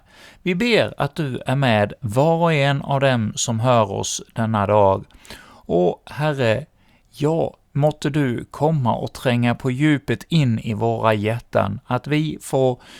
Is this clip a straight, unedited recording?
no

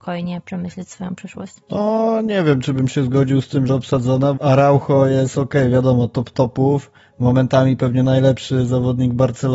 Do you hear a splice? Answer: yes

